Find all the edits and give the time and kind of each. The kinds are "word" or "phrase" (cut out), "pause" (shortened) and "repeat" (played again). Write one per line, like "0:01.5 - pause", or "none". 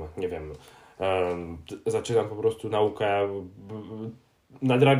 none